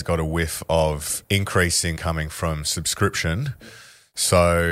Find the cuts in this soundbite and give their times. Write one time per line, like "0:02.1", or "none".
0:01.2
0:02.0